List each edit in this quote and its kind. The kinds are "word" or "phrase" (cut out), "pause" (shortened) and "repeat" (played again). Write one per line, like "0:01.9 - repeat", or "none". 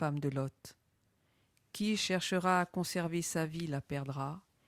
none